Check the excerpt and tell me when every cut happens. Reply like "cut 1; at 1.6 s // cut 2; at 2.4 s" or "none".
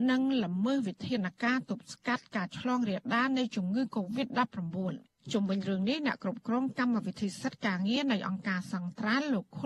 cut 1; at 5.1 s